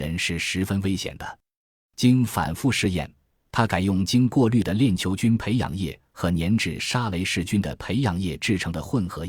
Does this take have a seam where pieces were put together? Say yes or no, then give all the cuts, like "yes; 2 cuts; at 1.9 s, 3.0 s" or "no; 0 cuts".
no; 0 cuts